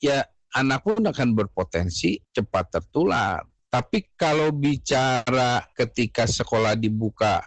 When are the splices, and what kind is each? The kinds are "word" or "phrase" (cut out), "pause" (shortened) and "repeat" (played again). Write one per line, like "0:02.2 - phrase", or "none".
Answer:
none